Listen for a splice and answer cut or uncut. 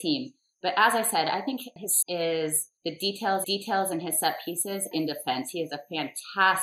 cut